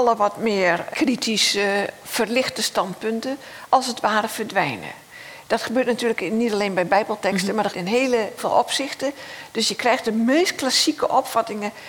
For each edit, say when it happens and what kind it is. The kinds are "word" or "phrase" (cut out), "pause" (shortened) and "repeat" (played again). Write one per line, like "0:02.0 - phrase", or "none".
0:00.9 - word
0:07.7 - word
0:08.4 - word